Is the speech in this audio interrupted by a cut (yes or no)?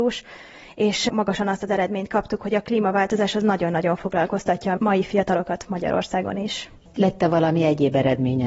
no